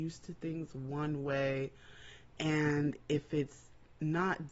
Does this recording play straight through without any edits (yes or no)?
yes